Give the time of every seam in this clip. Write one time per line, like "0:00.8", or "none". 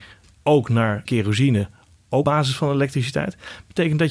0:01.1
0:02.2